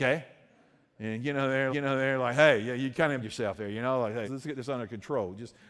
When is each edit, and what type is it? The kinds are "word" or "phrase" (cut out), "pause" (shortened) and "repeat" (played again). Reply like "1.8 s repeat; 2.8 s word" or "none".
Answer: 1.7 s repeat; 3.2 s word; 4.2 s word

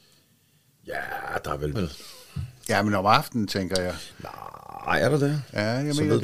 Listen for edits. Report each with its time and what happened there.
1.8 s word

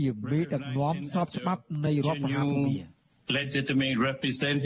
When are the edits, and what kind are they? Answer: none

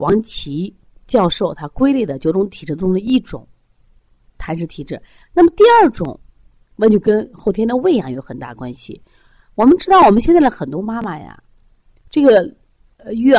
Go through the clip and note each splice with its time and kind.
none

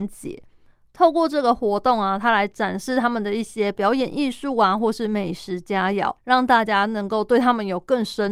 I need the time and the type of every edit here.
6.2 s pause

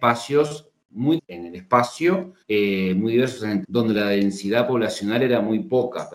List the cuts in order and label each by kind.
1.2 s word; 2.4 s pause; 3.6 s word

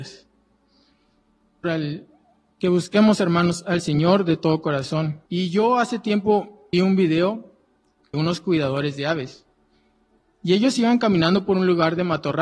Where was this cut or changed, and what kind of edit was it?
1.6 s phrase; 5.3 s pause; 6.7 s word; 8.1 s word

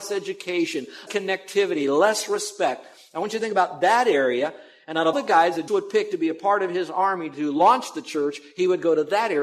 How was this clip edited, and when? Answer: 1.1 s word; 5.1 s word; 5.7 s word

